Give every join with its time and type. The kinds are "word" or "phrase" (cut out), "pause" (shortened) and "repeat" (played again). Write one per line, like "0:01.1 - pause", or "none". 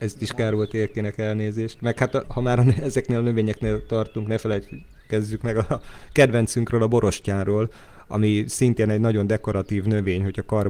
0:02.2 - word